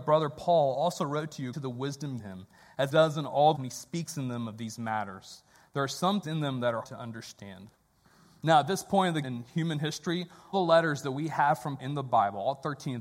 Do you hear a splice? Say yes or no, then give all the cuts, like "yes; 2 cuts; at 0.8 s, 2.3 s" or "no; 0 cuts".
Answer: yes; 9 cuts; at 1.5 s, 2.2 s, 2.9 s, 3.5 s, 6.2 s, 6.8 s, 9.2 s, 10.5 s, 11.8 s